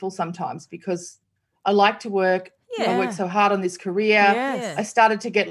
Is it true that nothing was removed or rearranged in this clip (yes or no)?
yes